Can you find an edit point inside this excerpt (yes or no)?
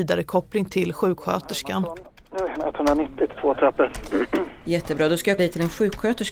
yes